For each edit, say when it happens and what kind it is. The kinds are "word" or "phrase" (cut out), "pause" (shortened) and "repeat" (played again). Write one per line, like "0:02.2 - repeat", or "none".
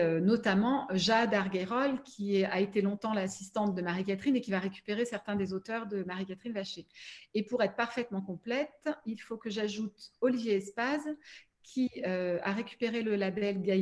none